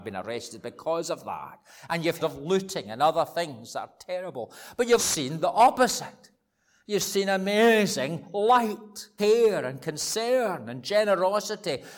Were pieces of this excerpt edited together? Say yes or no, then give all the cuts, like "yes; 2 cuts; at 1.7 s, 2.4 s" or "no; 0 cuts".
yes; 3 cuts; at 2.2 s, 5.0 s, 9.2 s